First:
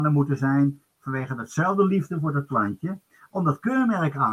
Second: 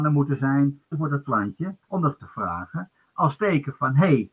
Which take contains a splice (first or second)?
second